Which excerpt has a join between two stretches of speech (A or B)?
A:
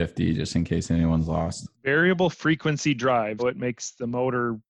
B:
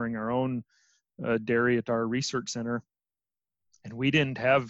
A